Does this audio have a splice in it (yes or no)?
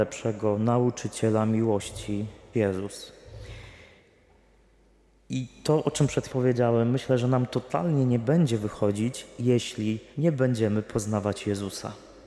yes